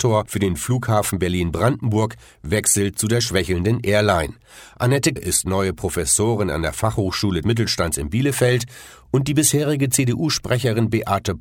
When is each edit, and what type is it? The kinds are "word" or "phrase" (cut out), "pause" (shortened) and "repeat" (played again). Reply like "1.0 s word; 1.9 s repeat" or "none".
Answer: 5.2 s word; 7.4 s word